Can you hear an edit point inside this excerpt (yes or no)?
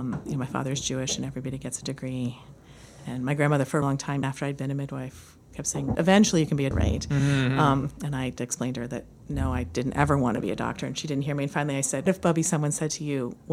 yes